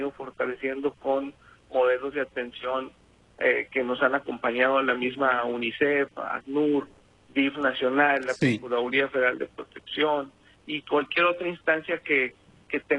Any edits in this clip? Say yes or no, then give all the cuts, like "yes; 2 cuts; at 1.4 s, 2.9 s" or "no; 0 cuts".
no; 0 cuts